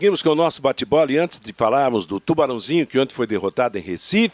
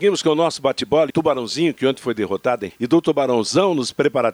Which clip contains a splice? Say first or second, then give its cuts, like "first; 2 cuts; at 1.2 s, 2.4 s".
second; 2 cuts; at 1.1 s, 2.7 s